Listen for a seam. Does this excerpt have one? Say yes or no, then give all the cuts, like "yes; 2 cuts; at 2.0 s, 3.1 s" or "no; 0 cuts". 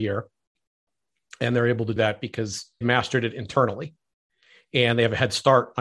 yes; 2 cuts; at 2.0 s, 2.8 s